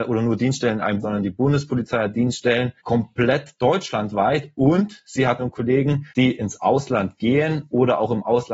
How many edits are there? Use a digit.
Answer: 4